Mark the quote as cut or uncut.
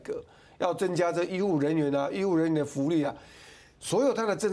uncut